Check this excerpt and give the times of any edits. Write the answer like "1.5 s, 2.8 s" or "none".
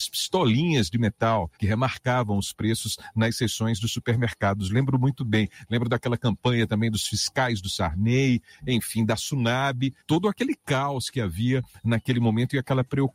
1.5 s, 10.0 s